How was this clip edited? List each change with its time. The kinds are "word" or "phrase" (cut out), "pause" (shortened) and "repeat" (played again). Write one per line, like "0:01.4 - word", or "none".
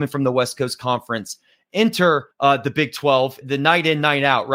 0:02.3 - pause
0:03.4 - phrase